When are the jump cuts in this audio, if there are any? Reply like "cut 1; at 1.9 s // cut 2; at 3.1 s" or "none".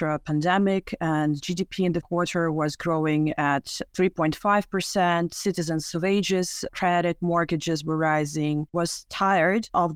cut 1; at 2.0 s // cut 2; at 8.7 s

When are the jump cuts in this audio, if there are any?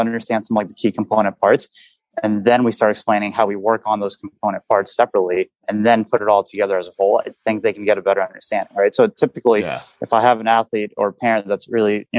cut 1; at 5.6 s

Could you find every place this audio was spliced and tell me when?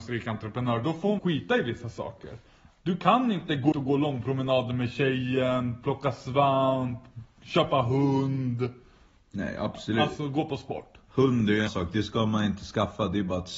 cut 1; at 1.2 s // cut 2; at 3.7 s // cut 3; at 11.7 s

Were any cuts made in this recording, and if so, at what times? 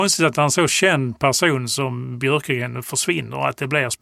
none

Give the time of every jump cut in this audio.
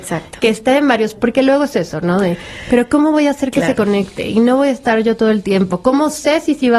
cut 1; at 1.2 s

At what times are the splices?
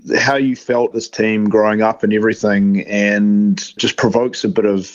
cut 1; at 0.9 s // cut 2; at 3.8 s

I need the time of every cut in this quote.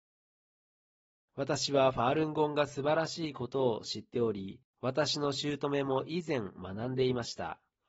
cut 1; at 4.7 s

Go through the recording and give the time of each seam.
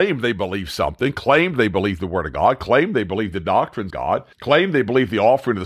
cut 1; at 3.9 s // cut 2; at 4.3 s

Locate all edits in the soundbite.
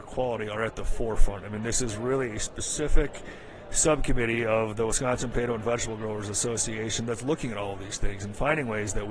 none

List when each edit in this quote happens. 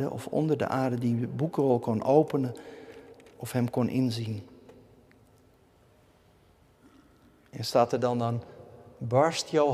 none

